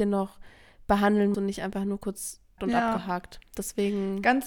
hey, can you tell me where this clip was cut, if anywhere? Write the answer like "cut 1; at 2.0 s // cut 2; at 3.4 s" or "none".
cut 1; at 1.3 s // cut 2; at 2.6 s

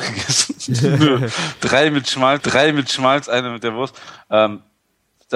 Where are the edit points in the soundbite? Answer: cut 1; at 2.4 s

